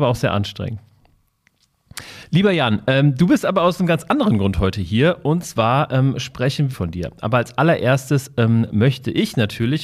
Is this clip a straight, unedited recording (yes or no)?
no